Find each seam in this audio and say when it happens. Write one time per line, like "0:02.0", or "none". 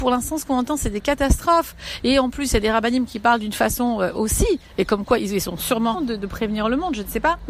0:05.9